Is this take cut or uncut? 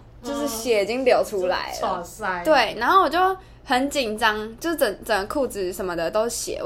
uncut